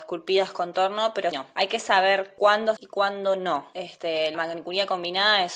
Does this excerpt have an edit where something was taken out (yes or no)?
yes